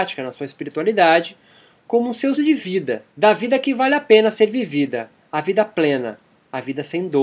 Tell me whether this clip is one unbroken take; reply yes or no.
no